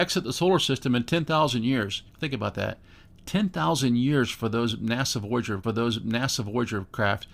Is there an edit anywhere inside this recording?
yes; 2 cuts; at 2.1 s, 5.6 s

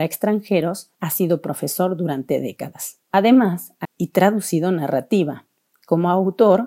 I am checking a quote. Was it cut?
yes; 3 cuts; at 0.9 s, 3.0 s, 3.8 s

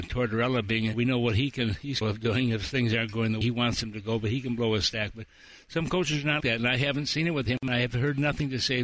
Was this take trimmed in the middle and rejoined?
yes; 4 cuts; at 0.9 s, 2.0 s, 3.4 s, 6.4 s

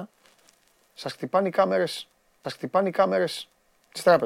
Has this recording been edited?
yes; 1 cut; at 2.4 s

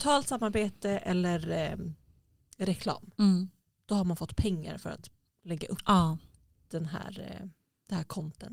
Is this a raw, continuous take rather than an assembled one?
yes; 0 cuts

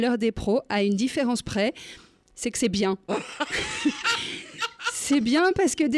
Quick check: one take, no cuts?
yes; 0 cuts

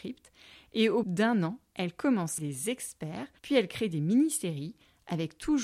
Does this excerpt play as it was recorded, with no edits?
no; 3 cuts; at 1.0 s, 2.4 s, 3.4 s

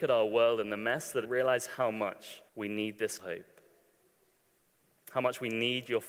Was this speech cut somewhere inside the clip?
yes; 3 cuts; at 1.2 s, 2.5 s, 3.2 s

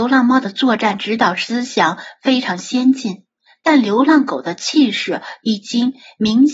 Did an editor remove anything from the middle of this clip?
yes; 1 cut; at 3.5 s

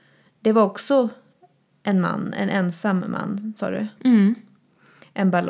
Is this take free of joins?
yes; 0 cuts

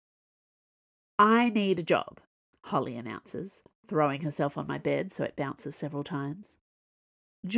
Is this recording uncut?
yes; 0 cuts

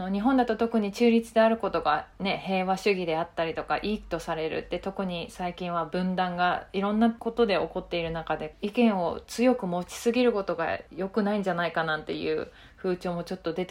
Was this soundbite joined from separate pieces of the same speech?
no; 0 cuts

